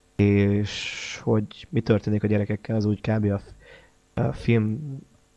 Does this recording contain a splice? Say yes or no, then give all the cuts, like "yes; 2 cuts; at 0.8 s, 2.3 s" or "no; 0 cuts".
no; 0 cuts